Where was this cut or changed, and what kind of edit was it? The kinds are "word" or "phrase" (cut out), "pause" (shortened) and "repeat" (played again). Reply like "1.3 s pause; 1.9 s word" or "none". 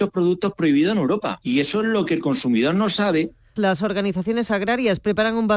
3.6 s word